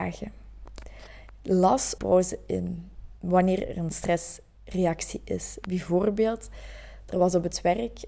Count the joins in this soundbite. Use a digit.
2